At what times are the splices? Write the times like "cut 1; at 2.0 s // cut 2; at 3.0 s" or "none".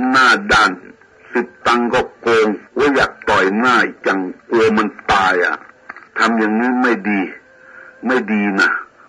cut 1; at 1.1 s // cut 2; at 2.7 s // cut 3; at 4.4 s // cut 4; at 6.1 s